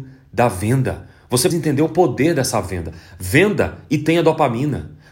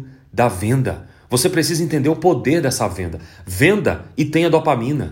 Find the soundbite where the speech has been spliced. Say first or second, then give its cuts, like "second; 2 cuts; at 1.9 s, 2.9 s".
first; 1 cut; at 1.5 s